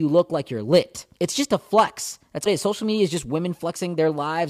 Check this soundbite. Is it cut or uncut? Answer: cut